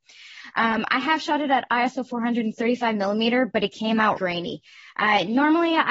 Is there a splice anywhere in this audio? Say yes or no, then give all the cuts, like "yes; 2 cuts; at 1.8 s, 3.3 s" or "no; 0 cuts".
yes; 1 cut; at 4.2 s